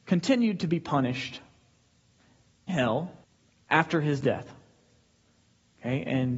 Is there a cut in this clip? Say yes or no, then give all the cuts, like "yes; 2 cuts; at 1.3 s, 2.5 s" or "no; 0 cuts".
yes; 2 cuts; at 2.7 s, 3.2 s